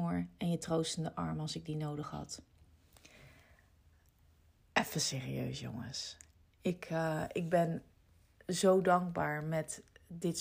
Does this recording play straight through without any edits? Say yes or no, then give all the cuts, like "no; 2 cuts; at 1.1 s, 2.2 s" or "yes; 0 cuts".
yes; 0 cuts